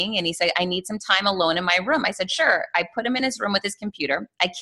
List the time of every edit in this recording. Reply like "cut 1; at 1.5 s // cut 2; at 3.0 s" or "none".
none